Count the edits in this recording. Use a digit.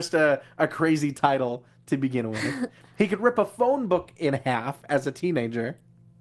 0